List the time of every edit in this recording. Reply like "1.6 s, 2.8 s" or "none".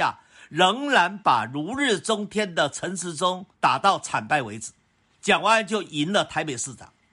3.5 s